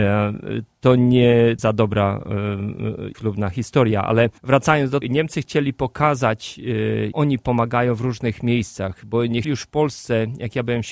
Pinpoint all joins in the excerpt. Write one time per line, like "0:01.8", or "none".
0:01.6
0:03.1
0:04.4
0:05.0
0:07.1
0:09.4